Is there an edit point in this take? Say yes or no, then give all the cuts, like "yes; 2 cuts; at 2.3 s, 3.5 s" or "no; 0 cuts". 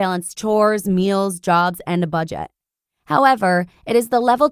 no; 0 cuts